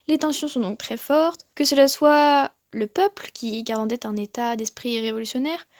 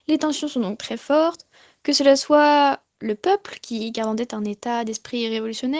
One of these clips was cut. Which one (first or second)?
first